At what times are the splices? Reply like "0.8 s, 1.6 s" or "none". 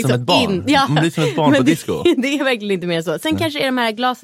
none